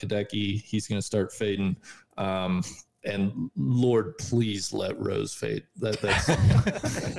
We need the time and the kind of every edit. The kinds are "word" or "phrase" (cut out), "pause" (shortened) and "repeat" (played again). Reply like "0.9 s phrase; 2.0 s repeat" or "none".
none